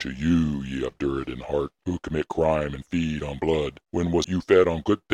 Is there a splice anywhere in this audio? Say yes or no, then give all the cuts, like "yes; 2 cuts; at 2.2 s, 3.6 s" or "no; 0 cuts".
yes; 2 cuts; at 3.8 s, 4.2 s